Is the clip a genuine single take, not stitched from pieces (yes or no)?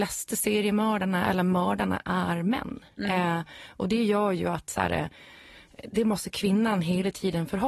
no